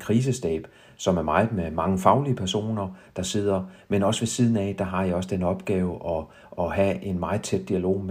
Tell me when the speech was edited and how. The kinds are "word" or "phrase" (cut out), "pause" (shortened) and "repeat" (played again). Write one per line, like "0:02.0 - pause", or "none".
none